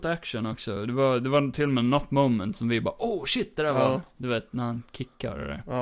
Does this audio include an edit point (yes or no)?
no